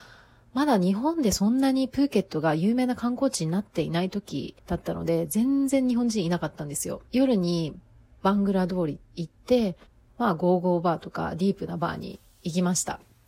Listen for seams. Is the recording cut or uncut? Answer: cut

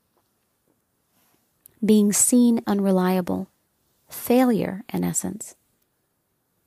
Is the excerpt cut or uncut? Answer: cut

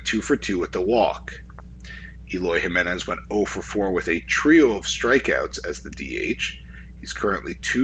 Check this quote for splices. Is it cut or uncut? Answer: uncut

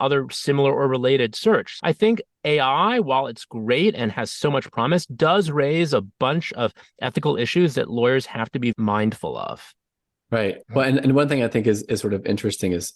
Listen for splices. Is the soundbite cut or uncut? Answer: cut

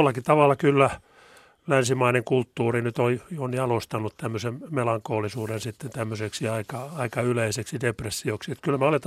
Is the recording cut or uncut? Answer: uncut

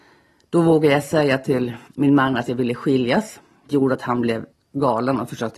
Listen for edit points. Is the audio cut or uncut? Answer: cut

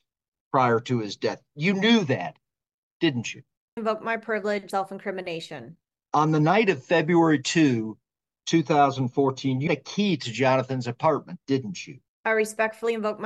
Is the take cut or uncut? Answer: cut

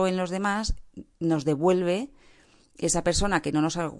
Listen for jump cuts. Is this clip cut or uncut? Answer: uncut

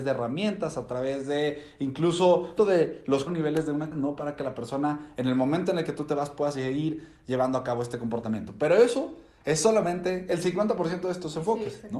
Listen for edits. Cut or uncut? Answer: cut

